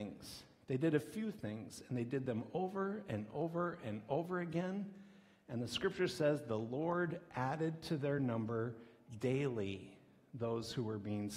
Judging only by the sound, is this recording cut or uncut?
uncut